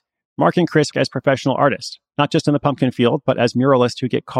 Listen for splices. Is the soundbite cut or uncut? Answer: cut